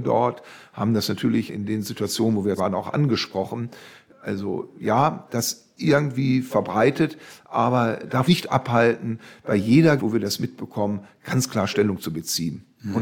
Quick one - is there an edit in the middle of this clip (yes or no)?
yes